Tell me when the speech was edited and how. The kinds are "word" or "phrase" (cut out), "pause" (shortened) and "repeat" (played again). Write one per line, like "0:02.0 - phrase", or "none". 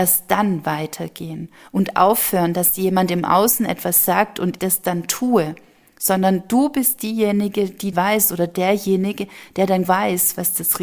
0:04.6 - word
0:07.9 - word
0:09.8 - word